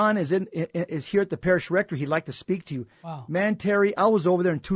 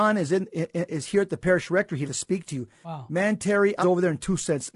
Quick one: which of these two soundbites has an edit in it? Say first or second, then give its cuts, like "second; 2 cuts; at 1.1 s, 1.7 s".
second; 2 cuts; at 2.1 s, 3.8 s